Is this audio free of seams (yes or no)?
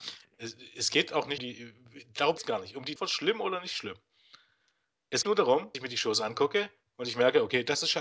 no